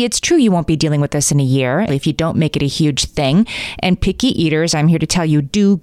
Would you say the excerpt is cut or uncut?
cut